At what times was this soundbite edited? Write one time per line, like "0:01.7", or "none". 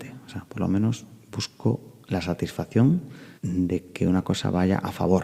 0:03.4